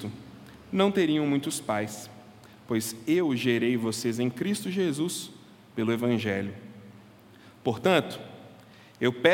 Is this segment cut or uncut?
uncut